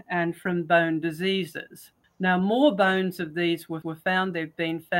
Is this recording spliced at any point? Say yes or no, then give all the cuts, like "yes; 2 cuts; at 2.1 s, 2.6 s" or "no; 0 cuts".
yes; 2 cuts; at 2.0 s, 3.8 s